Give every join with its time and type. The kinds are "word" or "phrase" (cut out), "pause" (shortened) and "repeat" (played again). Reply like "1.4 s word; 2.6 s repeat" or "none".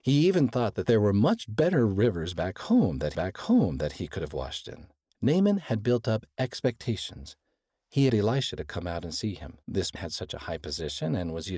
3.1 s repeat; 5.1 s pause; 8.1 s word; 9.6 s pause; 10.0 s phrase